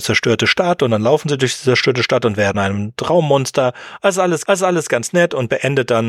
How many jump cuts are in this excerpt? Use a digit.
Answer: 2